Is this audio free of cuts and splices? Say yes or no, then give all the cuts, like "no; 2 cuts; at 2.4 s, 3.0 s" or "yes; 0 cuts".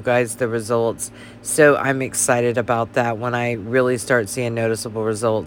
yes; 0 cuts